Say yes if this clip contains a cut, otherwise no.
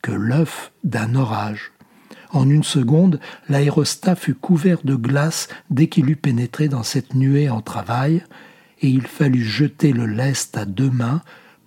no